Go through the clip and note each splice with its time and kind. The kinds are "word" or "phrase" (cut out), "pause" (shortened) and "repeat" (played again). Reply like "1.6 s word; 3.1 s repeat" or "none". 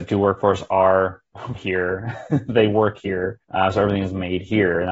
1.5 s word; 3.4 s pause